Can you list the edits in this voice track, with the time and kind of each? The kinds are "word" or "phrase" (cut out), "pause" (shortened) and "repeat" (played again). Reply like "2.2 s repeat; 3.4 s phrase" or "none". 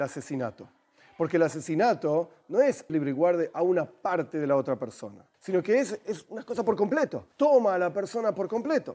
2.9 s phrase; 5.3 s pause; 7.3 s pause